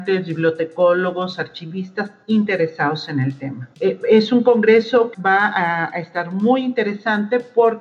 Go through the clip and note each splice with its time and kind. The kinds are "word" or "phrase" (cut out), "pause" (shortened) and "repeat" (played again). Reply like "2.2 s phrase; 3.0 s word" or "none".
3.7 s pause; 5.1 s word